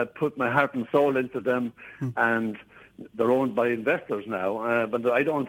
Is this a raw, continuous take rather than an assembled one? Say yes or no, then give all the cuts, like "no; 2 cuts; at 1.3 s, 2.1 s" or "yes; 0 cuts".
yes; 0 cuts